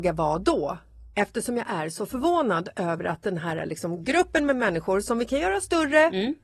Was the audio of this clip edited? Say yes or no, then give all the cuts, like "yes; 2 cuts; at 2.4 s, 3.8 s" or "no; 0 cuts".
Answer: no; 0 cuts